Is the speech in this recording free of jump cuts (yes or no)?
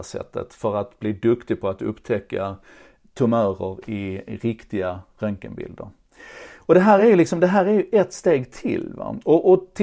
yes